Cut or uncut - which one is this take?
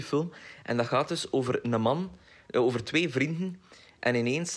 uncut